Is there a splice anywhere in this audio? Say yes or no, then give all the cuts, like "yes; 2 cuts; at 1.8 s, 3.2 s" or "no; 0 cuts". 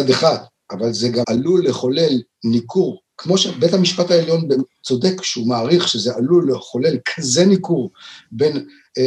yes; 1 cut; at 1.2 s